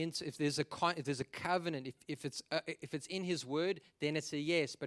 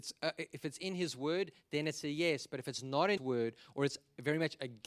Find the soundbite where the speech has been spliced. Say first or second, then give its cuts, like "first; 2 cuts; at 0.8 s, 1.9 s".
second; 1 cut; at 3.2 s